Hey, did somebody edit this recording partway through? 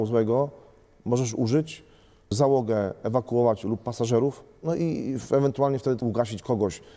no; 0 cuts

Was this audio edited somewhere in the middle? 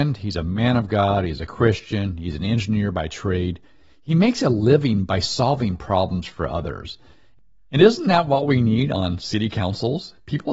no; 0 cuts

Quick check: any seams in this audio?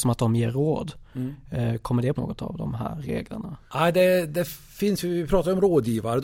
yes; 2 cuts; at 2.2 s, 3.6 s

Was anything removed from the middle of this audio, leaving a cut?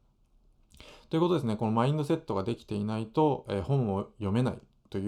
no; 0 cuts

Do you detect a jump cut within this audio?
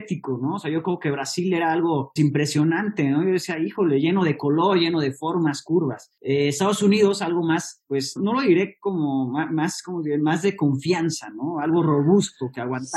yes; 2 cuts; at 2.2 s, 8.2 s

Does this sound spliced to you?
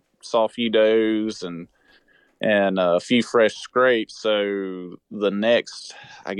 no; 0 cuts

